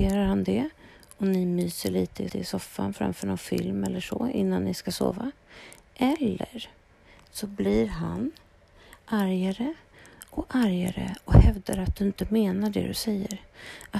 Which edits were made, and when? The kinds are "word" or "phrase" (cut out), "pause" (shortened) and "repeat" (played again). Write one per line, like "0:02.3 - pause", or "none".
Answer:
0:02.3 - repeat